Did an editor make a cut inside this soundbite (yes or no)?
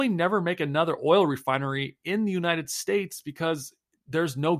no